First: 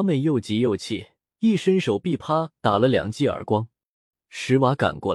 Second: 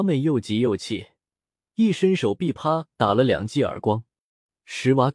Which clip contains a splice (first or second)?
first